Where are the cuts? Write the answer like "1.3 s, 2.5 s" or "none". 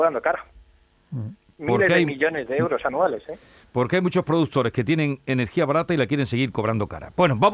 none